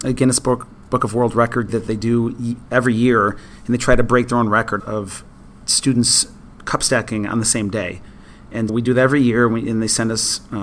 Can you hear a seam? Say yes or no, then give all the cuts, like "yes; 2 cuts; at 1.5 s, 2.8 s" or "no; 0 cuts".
yes; 4 cuts; at 1.7 s, 4.8 s, 5.6 s, 8.7 s